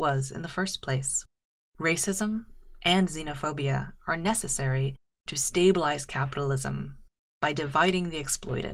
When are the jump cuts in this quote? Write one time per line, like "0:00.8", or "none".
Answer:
none

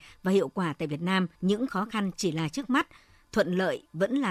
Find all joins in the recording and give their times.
0:01.3

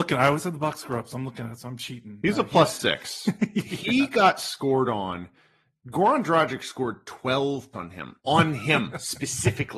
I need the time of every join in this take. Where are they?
0:07.7
0:08.2

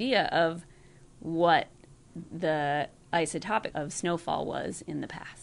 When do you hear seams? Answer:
0:03.7

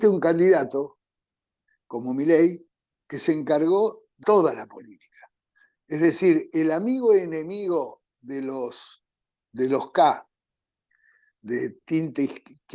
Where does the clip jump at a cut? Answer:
0:04.2
0:05.5

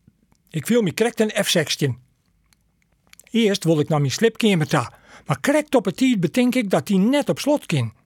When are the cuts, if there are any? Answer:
none

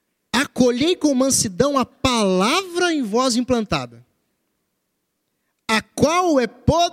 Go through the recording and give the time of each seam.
none

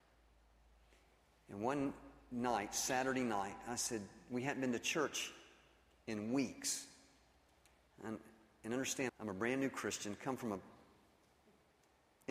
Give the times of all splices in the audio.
0:09.1

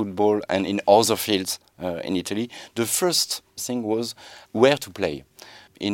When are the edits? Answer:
0:03.6
0:04.4

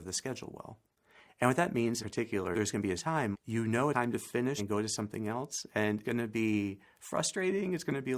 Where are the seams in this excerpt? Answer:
0:02.0
0:02.5
0:03.0
0:03.3
0:03.9
0:04.6
0:06.0

